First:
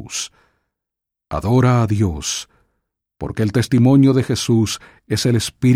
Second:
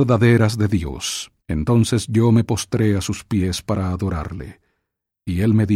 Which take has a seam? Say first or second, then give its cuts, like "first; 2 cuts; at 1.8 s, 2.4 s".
second; 1 cut; at 1.4 s